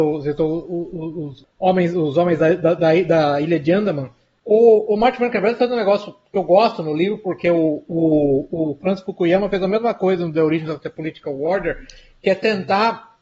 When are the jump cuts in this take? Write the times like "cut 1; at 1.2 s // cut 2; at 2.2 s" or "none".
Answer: none

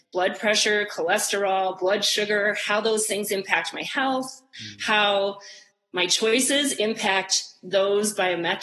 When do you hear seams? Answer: none

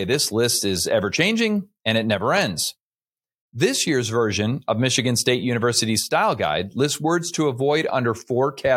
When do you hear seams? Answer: none

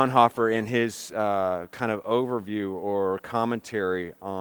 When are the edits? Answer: none

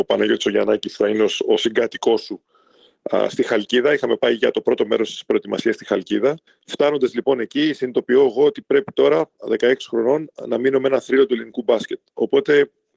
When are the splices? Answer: cut 1; at 6.5 s

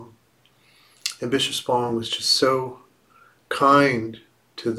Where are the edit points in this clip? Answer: none

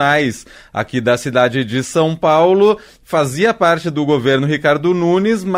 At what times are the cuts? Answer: none

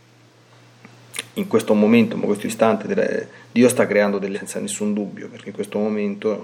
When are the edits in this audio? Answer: cut 1; at 2.5 s // cut 2; at 4.3 s

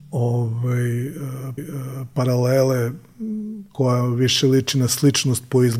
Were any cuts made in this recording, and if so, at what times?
cut 1; at 1.6 s

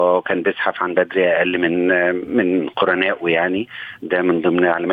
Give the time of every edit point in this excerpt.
cut 1; at 1.0 s

